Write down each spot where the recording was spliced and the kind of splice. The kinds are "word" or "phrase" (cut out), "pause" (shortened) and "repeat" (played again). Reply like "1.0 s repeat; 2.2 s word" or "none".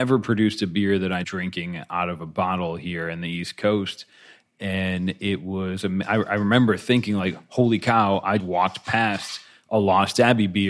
1.2 s phrase; 8.4 s word